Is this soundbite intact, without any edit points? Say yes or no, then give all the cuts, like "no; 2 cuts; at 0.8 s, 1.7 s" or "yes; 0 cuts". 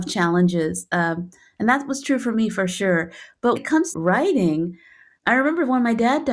no; 3 cuts; at 3.6 s, 3.9 s, 5.2 s